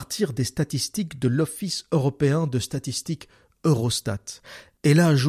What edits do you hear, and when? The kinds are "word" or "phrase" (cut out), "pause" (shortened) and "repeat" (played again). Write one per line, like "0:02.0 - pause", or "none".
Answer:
none

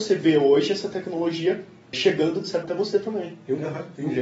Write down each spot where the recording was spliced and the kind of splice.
0:01.9 - word
0:02.6 - word

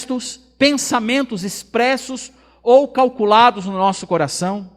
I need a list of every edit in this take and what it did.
none

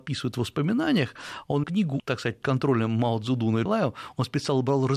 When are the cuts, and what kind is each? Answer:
0:01.6 - word
0:02.0 - word
0:02.4 - word
0:03.7 - word

